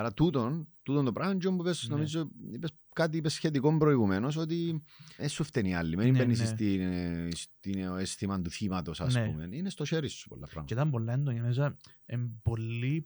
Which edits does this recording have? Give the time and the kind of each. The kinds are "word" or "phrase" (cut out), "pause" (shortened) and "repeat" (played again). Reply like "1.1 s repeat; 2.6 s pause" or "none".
2.8 s pause; 5.2 s word